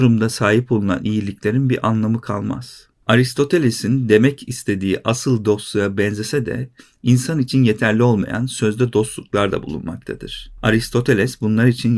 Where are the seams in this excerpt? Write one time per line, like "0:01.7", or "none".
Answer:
none

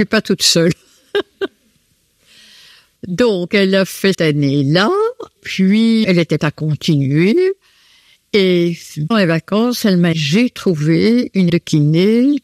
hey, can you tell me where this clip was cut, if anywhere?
0:03.0
0:04.1
0:05.4
0:06.0
0:06.4
0:09.1
0:10.1
0:11.5

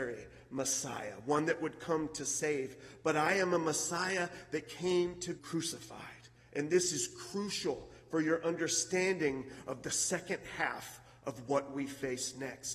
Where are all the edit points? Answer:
0:05.4

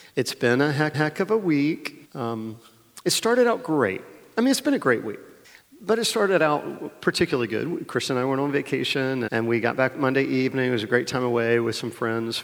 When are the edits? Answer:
0:00.9
0:02.0
0:05.4
0:09.3

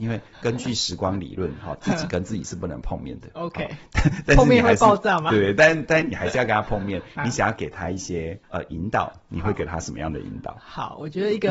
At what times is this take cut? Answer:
0:08.4

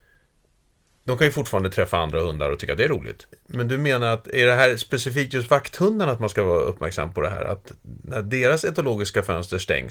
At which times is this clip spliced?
0:03.3

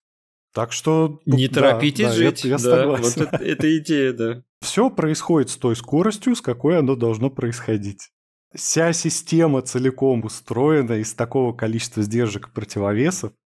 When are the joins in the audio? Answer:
0:03.3
0:04.5
0:08.4

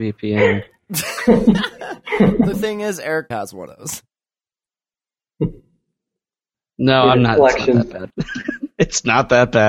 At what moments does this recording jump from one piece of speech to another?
0:02.5
0:03.3
0:03.7
0:08.1

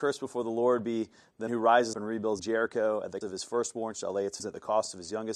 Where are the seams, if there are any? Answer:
0:01.5
0:01.9
0:02.4
0:03.2
0:04.4

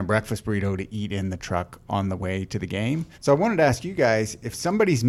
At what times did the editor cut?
0:03.1

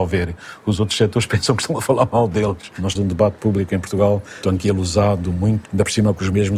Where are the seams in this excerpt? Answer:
0:03.0
0:04.4
0:05.7

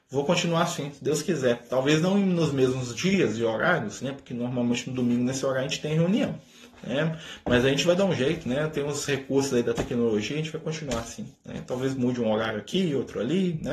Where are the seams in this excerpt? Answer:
0:11.4

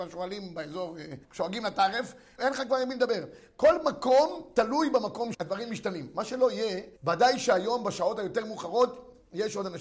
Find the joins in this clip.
0:01.2
0:02.4
0:05.3
0:07.0

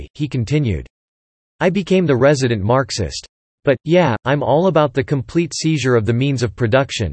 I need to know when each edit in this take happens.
none

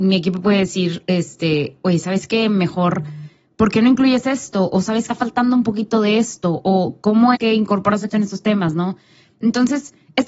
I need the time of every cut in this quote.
0:05.1
0:07.4
0:08.1

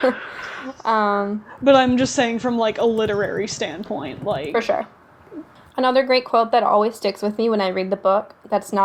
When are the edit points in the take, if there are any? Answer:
none

